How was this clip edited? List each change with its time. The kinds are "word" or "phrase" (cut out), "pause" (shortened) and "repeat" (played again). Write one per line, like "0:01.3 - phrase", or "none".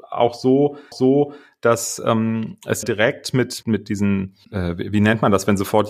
0:00.9 - repeat
0:02.8 - word
0:03.6 - word
0:04.4 - pause